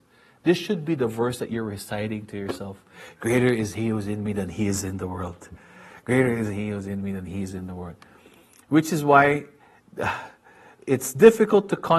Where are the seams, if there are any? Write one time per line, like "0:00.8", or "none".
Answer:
none